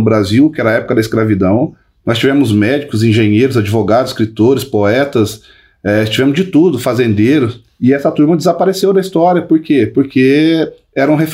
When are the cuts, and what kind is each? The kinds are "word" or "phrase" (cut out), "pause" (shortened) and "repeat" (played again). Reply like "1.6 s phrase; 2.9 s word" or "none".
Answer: none